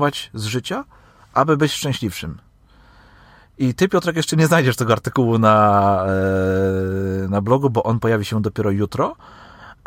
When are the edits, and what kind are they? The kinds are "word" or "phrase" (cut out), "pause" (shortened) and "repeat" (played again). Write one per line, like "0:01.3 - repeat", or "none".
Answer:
none